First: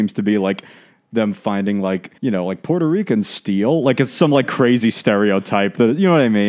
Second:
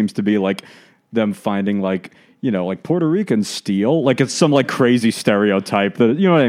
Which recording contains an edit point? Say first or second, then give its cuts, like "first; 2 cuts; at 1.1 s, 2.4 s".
first; 1 cut; at 2.2 s